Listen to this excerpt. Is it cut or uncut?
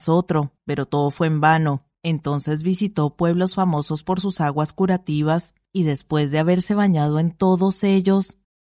cut